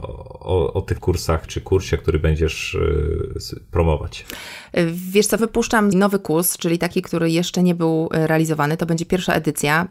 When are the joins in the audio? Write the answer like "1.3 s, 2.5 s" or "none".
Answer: 1.0 s, 1.5 s, 5.4 s, 5.9 s